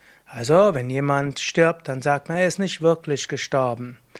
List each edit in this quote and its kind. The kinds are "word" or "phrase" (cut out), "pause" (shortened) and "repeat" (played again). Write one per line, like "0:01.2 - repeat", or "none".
none